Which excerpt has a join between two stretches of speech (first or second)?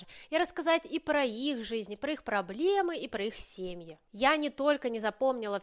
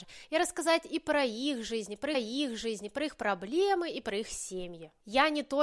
second